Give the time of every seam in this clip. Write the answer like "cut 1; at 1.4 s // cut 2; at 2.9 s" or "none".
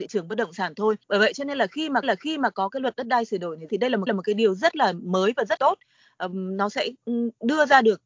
cut 1; at 1.0 s // cut 2; at 2.0 s // cut 3; at 3.7 s // cut 4; at 4.1 s // cut 5; at 5.6 s